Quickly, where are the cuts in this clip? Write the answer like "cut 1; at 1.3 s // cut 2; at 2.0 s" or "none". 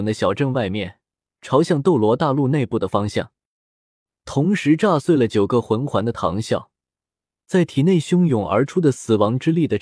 none